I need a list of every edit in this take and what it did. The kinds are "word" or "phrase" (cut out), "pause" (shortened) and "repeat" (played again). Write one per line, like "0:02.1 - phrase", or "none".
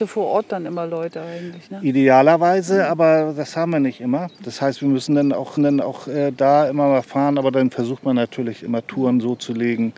0:04.3 - pause
0:05.6 - repeat